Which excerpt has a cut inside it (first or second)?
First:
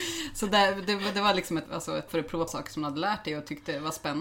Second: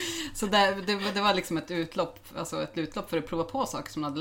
first